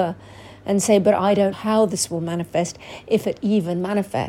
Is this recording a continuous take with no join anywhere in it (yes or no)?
no